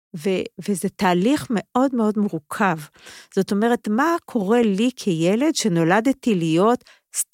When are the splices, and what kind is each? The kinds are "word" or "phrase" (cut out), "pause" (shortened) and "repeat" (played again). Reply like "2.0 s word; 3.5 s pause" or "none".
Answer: none